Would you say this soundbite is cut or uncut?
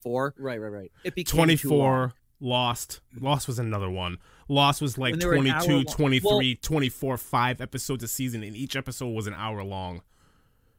uncut